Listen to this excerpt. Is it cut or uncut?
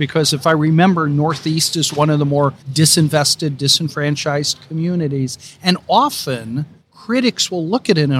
cut